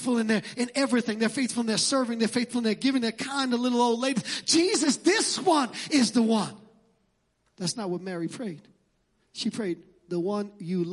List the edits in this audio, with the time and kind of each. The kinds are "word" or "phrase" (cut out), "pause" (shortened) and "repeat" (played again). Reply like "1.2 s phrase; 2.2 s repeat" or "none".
none